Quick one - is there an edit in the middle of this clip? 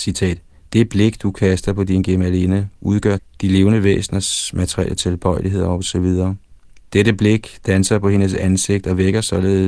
yes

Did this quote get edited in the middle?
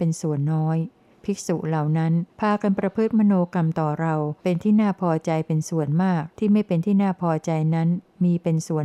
yes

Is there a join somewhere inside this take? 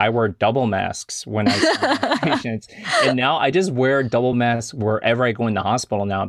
no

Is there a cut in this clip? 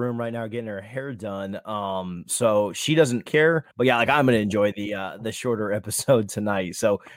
yes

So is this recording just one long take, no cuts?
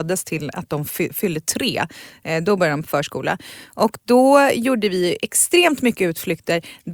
yes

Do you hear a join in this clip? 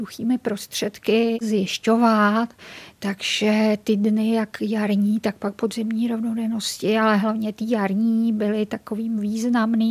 no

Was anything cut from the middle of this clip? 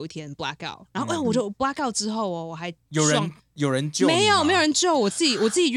no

